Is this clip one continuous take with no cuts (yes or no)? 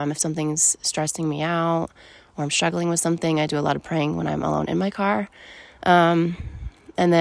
yes